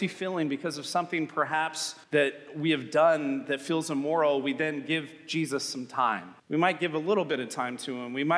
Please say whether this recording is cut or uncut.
cut